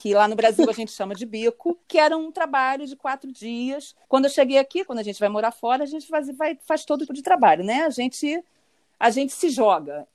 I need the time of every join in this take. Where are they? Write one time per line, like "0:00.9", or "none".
0:01.8
0:04.0
0:07.1

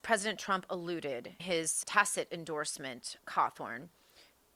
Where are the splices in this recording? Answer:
0:01.4
0:01.8
0:03.2

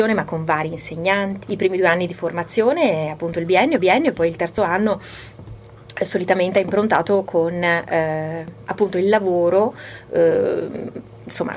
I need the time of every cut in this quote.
0:01.4
0:03.8

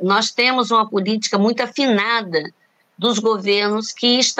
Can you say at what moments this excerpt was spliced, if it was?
none

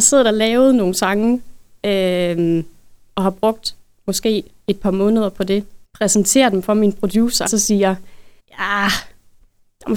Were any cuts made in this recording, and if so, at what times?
0:05.8
0:07.5
0:08.4

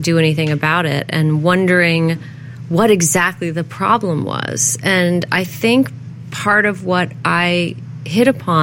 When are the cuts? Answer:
none

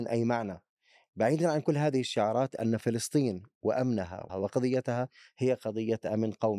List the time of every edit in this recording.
0:04.3

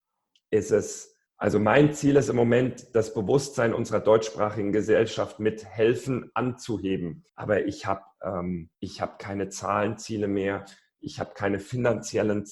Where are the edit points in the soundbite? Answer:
0:01.3
0:07.3
0:08.7

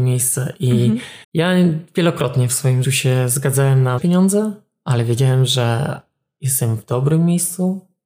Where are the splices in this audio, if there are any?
0:01.2
0:02.8
0:04.0

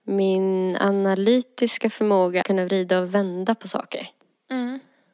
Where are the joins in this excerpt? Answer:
0:02.4

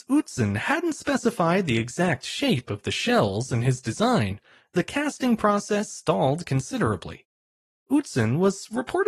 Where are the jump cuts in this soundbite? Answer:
none

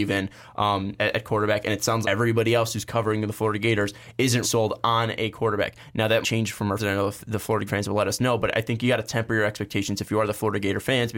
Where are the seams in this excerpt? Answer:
0:01.0
0:02.0
0:04.4
0:06.2
0:06.8
0:07.7

